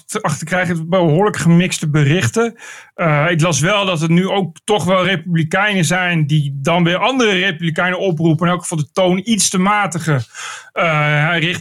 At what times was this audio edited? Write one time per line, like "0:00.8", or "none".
none